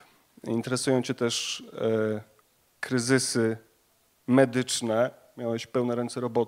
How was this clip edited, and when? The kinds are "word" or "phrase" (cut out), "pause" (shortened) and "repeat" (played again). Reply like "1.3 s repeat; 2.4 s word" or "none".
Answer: none